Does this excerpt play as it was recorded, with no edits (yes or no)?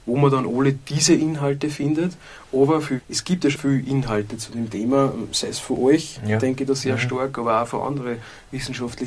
no